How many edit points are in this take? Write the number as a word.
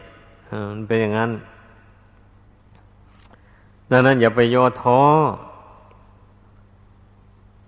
zero